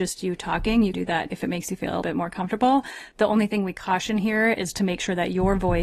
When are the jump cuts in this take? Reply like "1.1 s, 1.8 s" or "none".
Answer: 0.9 s, 1.3 s, 2.0 s